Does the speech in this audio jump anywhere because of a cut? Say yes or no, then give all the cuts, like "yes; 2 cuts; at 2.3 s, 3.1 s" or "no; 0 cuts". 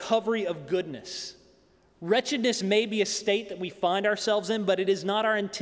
no; 0 cuts